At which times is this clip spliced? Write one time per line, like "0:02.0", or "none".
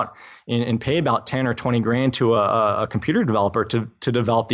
none